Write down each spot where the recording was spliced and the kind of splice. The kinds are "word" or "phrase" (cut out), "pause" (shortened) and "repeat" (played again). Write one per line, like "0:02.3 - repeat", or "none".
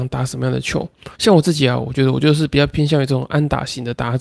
0:01.1 - pause